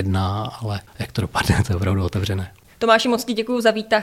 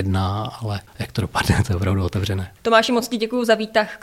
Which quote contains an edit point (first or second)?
second